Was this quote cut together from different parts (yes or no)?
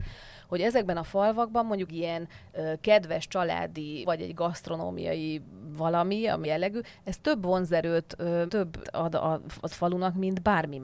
yes